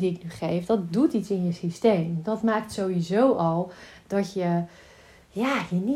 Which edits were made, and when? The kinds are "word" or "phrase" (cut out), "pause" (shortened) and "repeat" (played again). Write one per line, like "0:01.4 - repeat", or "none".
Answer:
none